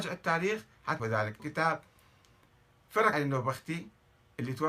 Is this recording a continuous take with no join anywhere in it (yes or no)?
no